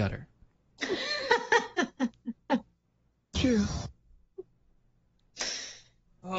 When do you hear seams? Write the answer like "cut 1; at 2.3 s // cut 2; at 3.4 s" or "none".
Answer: cut 1; at 3.4 s